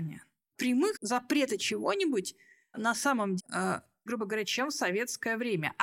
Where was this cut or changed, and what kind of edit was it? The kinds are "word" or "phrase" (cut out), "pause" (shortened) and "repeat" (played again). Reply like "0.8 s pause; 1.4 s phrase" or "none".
0.9 s word; 3.4 s word; 4.1 s word